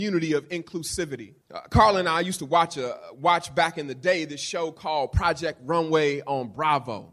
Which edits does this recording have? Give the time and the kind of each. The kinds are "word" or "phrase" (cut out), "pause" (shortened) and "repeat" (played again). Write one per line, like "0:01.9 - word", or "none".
0:01.4 - pause